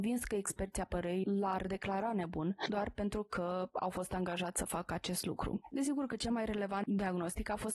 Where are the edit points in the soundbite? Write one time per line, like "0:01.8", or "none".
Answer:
none

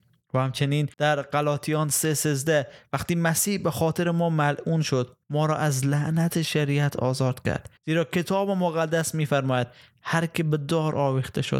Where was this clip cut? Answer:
0:00.9
0:05.2
0:07.8

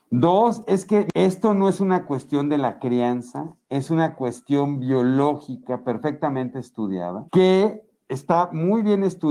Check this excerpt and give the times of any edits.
0:03.6
0:07.3

